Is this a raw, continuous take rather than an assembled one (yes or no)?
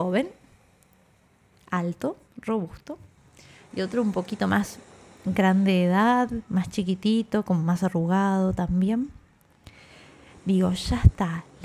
yes